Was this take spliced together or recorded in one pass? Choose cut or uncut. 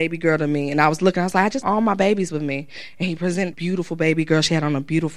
cut